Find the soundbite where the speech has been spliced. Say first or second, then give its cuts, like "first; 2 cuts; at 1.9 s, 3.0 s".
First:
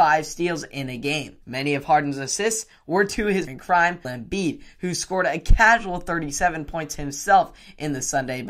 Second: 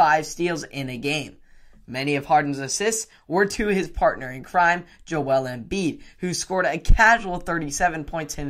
first; 3 cuts; at 1.4 s, 3.5 s, 4.0 s